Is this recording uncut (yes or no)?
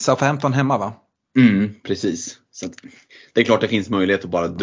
yes